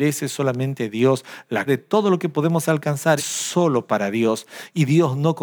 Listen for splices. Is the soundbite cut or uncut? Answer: cut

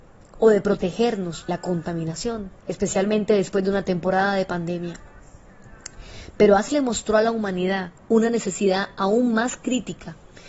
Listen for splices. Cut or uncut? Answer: cut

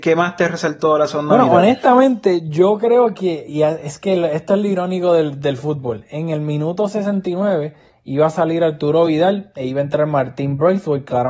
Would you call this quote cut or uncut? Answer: uncut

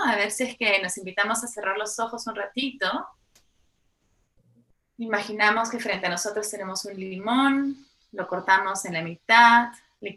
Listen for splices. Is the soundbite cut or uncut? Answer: uncut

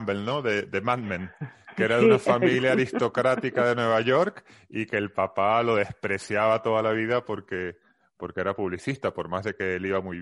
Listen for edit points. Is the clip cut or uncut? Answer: uncut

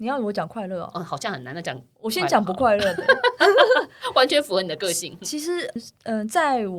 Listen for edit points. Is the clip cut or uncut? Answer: cut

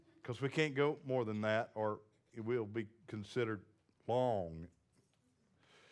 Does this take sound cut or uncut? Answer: uncut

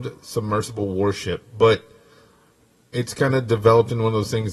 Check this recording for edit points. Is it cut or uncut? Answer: uncut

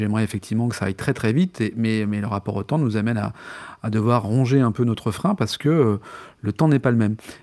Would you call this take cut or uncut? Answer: uncut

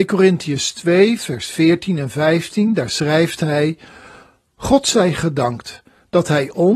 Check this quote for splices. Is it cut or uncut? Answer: uncut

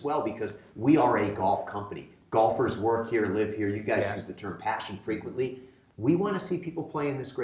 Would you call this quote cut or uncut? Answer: uncut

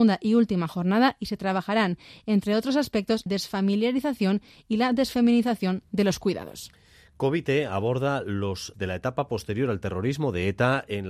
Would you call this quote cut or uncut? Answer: cut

